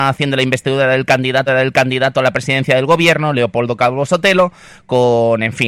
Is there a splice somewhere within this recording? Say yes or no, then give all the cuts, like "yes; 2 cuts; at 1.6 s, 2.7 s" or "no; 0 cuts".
yes; 1 cut; at 1.5 s